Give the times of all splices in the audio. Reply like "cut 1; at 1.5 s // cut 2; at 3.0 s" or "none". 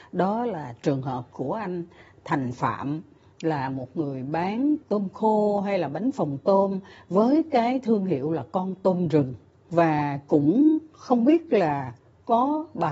none